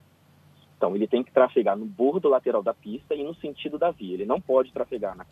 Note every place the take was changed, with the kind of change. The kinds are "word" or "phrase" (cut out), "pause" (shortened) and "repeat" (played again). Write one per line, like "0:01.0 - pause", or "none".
none